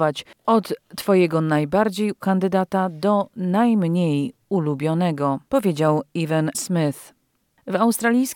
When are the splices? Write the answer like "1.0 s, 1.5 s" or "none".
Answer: 2.2 s, 5.5 s, 6.5 s